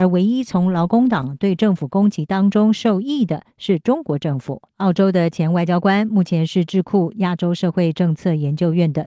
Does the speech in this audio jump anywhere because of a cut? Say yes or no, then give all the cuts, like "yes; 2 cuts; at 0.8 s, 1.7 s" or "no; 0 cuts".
yes; 1 cut; at 4.7 s